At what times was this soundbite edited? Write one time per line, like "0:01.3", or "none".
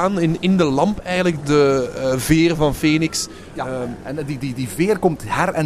0:01.4

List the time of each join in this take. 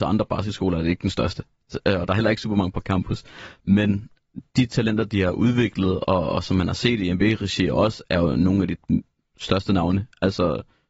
none

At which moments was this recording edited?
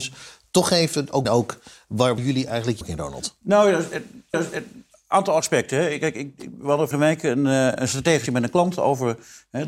0:01.2
0:02.2
0:02.8
0:04.3
0:06.9
0:08.3

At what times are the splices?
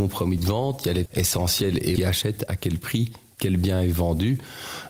0:01.1
0:02.0

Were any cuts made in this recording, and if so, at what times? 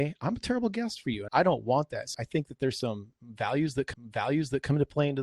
0:01.3
0:02.1
0:03.9

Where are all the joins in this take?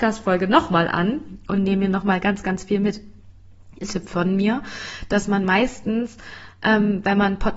0:03.9

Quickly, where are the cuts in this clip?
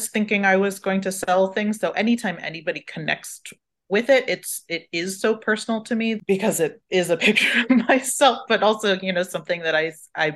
none

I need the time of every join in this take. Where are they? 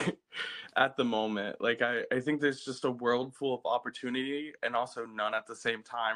none

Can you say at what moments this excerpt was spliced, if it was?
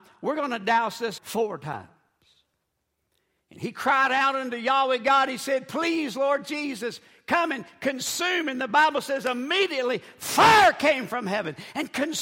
0:01.2

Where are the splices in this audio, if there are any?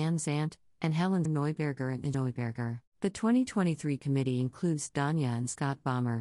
0:01.3
0:02.1
0:02.9
0:04.0

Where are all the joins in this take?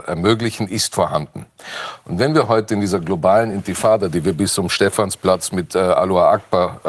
none

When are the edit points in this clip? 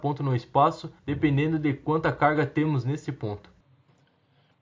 0:01.0

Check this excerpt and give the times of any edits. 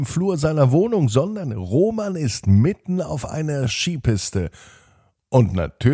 none

